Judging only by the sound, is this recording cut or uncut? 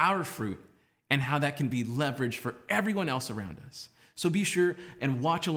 uncut